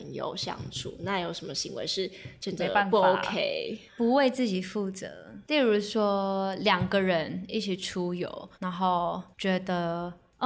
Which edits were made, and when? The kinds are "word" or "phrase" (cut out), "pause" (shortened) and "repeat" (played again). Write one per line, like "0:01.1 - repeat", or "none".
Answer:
0:03.9 - pause
0:08.5 - pause
0:09.3 - pause